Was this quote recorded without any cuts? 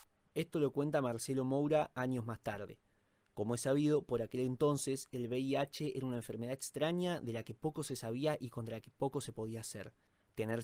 yes; 0 cuts

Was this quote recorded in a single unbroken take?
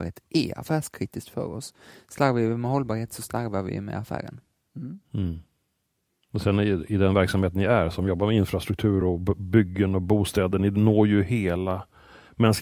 yes; 0 cuts

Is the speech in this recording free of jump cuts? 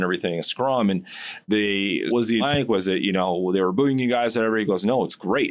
no; 3 cuts; at 1.5 s, 2.1 s, 2.4 s

